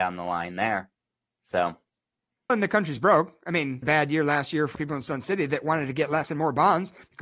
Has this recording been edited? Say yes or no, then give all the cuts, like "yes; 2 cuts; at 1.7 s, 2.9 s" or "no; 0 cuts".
yes; 4 cuts; at 2.5 s, 3.8 s, 4.8 s, 6.2 s